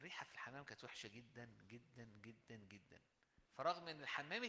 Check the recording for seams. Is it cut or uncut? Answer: cut